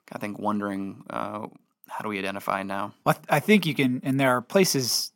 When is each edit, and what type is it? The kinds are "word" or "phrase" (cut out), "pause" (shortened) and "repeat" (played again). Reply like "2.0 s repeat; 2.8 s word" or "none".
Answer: 3.0 s pause